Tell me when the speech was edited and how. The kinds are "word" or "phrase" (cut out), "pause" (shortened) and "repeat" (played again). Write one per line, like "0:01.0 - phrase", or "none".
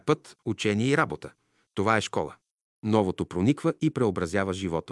none